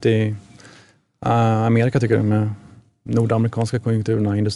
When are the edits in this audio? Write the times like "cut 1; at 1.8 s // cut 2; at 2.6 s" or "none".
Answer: none

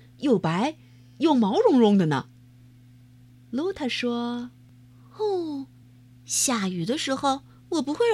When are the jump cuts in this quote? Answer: none

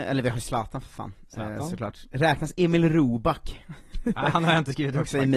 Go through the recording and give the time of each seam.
none

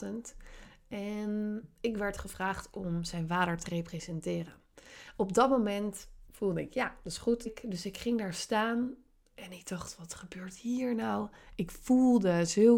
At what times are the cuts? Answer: cut 1; at 7.5 s

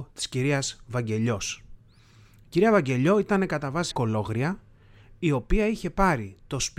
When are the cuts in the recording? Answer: cut 1; at 3.9 s

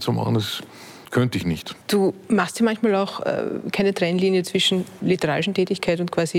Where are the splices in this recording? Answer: cut 1; at 1.0 s // cut 2; at 1.8 s // cut 3; at 5.0 s

